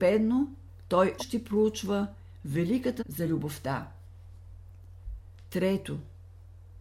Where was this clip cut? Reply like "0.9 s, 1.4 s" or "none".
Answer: 1.2 s, 3.0 s